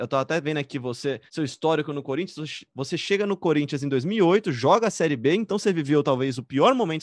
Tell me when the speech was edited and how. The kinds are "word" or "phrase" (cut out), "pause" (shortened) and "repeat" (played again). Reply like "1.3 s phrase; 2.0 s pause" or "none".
1.3 s pause